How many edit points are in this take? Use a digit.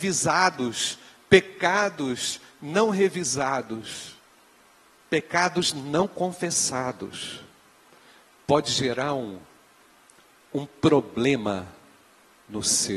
0